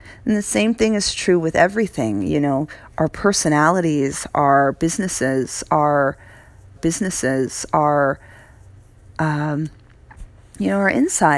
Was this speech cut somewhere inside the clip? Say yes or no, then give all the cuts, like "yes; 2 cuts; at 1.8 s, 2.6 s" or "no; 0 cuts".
yes; 1 cut; at 6.8 s